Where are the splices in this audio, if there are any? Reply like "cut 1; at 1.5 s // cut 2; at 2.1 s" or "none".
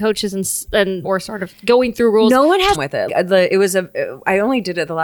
cut 1; at 1.0 s // cut 2; at 2.7 s // cut 3; at 3.1 s